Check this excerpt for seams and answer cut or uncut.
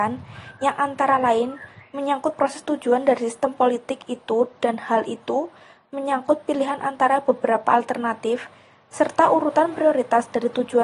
uncut